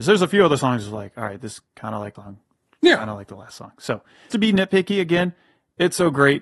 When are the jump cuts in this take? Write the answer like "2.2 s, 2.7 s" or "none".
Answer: 2.2 s, 4.3 s